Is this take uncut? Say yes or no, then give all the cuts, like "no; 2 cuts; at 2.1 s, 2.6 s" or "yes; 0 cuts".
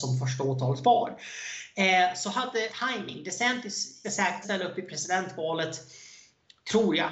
no; 3 cuts; at 2.7 s, 4.0 s, 4.4 s